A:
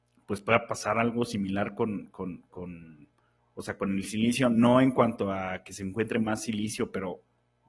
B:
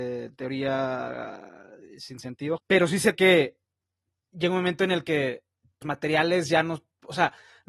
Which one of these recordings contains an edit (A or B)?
B